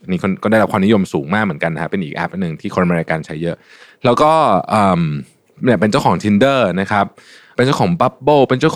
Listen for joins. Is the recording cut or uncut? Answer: uncut